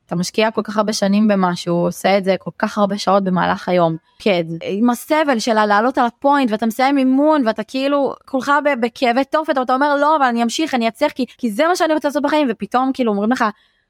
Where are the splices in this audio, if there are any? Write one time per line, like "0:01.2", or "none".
0:11.3

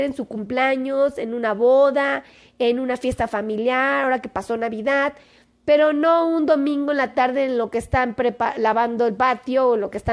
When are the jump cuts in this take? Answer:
none

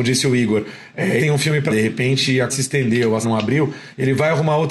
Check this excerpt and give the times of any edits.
0:01.2
0:01.7
0:02.5
0:03.2

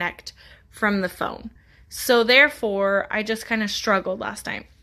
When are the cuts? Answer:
none

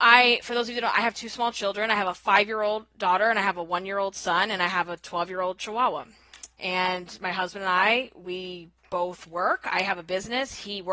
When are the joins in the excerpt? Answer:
0:08.8

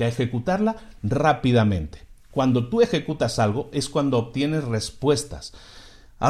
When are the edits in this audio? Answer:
none

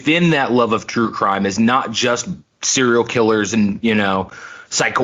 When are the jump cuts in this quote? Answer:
none

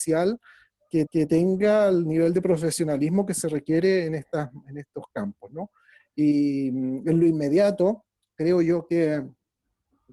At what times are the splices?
0:01.1

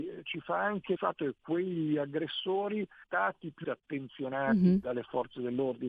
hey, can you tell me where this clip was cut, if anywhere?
0:01.0
0:01.4
0:03.0
0:03.6

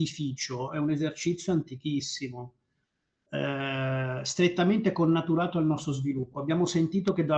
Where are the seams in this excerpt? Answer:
none

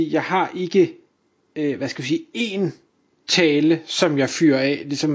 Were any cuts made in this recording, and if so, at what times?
none

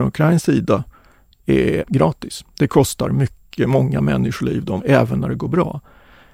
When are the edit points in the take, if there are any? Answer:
0:01.8
0:04.8

